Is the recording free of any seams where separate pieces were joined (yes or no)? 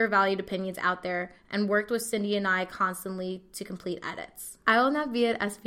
no